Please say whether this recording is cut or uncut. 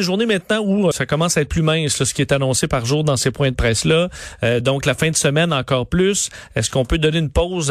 cut